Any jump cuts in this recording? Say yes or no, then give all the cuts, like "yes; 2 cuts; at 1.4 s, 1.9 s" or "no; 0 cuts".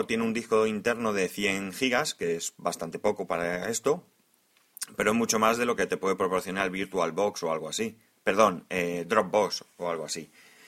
no; 0 cuts